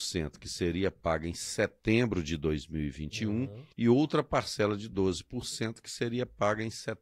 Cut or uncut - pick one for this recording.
cut